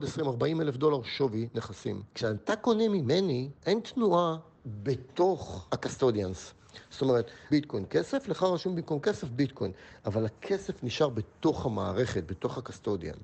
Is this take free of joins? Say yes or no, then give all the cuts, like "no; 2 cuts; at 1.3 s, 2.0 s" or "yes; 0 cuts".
no; 3 cuts; at 2.1 s, 3.6 s, 7.5 s